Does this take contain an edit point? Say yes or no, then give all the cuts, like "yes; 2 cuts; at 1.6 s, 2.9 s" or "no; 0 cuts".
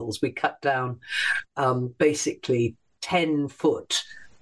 no; 0 cuts